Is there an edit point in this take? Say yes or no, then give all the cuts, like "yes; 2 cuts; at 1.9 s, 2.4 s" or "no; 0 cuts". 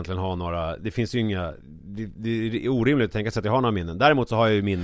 no; 0 cuts